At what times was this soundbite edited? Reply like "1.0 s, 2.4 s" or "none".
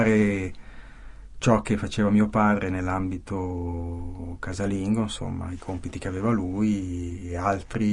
none